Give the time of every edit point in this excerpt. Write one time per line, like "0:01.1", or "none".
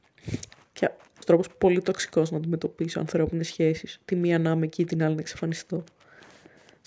0:01.2